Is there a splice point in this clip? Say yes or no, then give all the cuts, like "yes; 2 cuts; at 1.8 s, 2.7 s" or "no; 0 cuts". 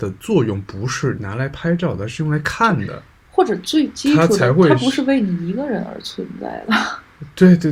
no; 0 cuts